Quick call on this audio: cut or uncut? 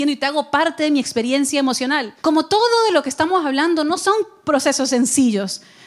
cut